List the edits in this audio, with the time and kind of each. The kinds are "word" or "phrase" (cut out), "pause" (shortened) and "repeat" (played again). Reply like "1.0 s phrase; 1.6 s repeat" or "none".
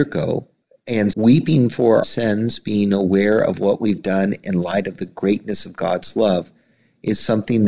1.1 s word; 2.0 s word